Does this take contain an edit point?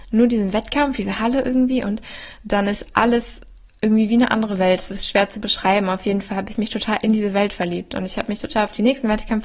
no; 0 cuts

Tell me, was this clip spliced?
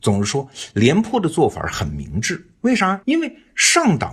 yes; 1 cut; at 3.0 s

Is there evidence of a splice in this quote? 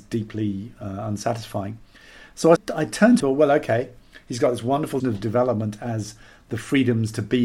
yes; 3 cuts; at 2.6 s, 3.2 s, 5.0 s

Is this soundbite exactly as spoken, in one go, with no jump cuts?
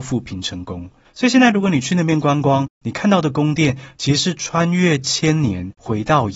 no; 1 cut; at 1.1 s

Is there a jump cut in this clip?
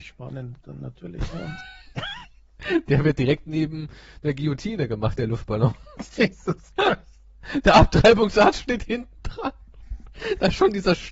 no; 0 cuts

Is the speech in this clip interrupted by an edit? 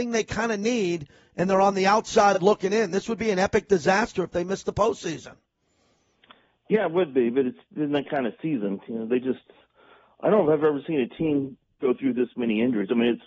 no; 0 cuts

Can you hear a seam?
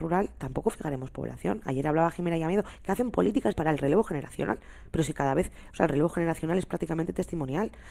yes; 1 cut; at 3.5 s

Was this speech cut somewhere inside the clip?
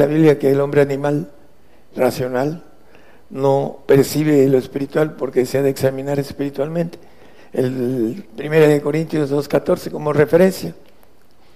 no; 0 cuts

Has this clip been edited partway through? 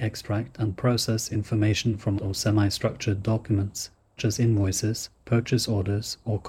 yes; 2 cuts; at 2.2 s, 4.2 s

